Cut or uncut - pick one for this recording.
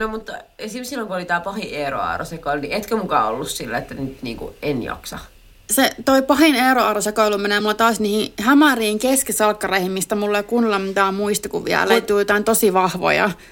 uncut